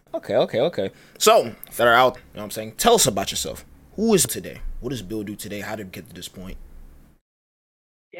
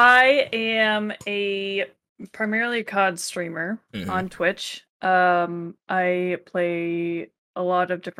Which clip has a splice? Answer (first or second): first